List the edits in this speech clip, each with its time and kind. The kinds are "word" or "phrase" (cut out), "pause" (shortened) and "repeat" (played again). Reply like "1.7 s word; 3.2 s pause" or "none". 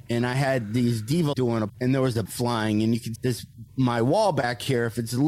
1.3 s phrase; 1.7 s word; 2.3 s word; 3.2 s word